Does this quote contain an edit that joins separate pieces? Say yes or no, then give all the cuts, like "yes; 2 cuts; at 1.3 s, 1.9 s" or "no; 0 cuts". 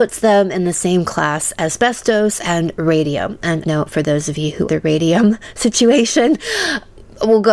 yes; 3 cuts; at 1.5 s, 3.6 s, 4.7 s